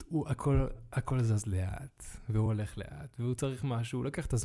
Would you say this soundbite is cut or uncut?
uncut